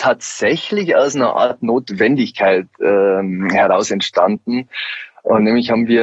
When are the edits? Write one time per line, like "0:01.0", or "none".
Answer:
none